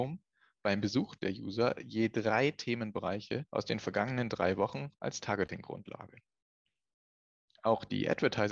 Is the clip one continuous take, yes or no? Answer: no